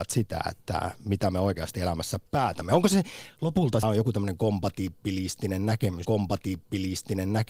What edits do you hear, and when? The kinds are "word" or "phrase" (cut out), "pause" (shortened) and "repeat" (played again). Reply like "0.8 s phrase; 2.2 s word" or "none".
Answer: 2.3 s pause; 3.8 s phrase; 6.0 s repeat